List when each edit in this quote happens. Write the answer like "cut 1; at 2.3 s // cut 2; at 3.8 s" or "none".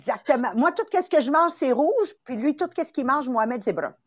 cut 1; at 2.2 s